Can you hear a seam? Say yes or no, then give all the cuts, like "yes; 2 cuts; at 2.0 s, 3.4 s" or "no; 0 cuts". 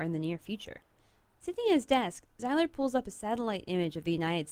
no; 0 cuts